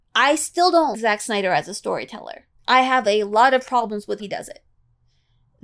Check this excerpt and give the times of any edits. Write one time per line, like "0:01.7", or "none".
0:00.9
0:02.5
0:04.2